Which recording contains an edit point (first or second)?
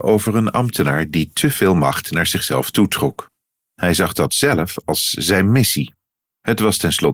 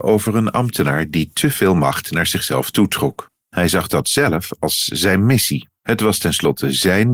second